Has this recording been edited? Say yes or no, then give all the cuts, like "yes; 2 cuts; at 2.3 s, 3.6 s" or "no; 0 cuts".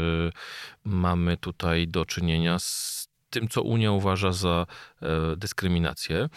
no; 0 cuts